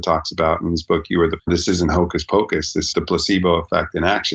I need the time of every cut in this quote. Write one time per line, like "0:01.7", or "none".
0:01.4
0:02.9